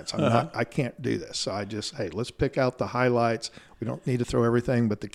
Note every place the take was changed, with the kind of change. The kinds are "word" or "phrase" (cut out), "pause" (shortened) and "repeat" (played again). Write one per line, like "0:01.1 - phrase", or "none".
none

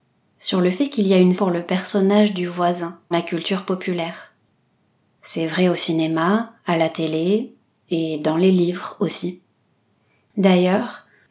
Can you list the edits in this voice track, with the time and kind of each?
0:01.4 - phrase
0:03.1 - word
0:06.6 - pause

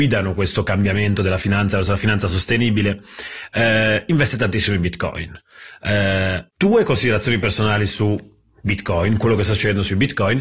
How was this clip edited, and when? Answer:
0:06.5 - pause

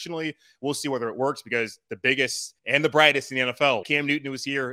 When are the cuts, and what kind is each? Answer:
0:02.6 - pause
0:03.8 - word

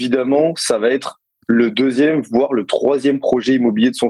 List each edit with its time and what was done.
none

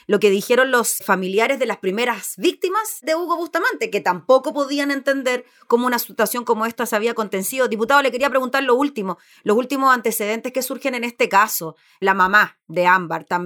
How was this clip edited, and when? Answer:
none

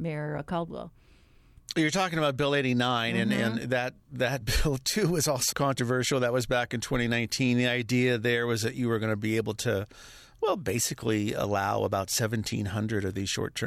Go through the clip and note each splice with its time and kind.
0:05.5 - word

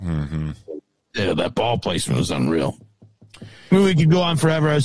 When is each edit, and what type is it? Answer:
none

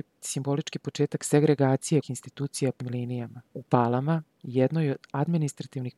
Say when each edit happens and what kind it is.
0:02.0 - word
0:02.8 - phrase
0:03.5 - pause

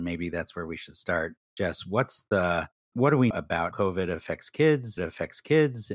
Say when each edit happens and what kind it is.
0:01.4 - pause
0:02.9 - word
0:03.3 - word
0:03.7 - word
0:05.0 - repeat

